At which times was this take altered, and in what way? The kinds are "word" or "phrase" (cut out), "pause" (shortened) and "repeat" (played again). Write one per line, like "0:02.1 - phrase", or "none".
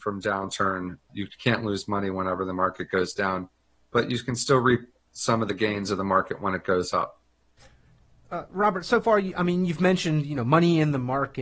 none